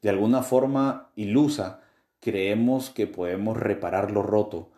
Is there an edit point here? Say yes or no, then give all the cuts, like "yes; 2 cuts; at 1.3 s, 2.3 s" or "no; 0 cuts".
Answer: no; 0 cuts